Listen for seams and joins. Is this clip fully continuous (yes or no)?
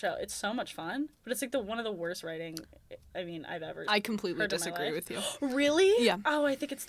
yes